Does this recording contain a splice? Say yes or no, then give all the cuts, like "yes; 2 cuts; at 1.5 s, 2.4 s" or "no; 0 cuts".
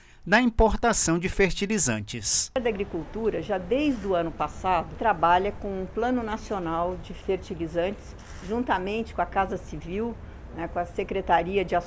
no; 0 cuts